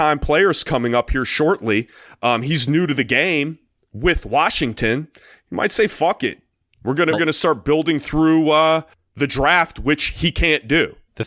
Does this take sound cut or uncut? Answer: cut